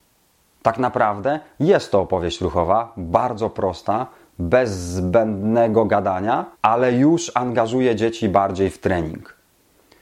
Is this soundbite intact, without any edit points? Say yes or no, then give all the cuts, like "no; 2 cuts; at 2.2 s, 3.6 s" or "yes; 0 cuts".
no; 1 cut; at 6.5 s